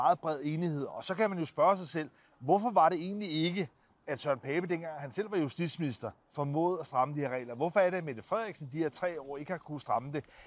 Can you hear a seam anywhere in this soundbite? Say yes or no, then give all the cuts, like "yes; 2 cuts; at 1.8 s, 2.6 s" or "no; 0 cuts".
no; 0 cuts